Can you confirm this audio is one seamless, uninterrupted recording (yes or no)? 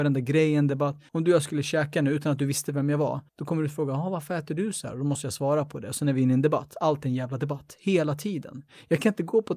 no